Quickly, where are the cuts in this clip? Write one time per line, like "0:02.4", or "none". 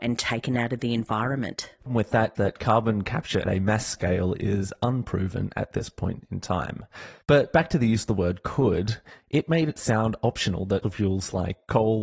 0:01.9
0:02.3
0:03.4
0:07.2
0:10.8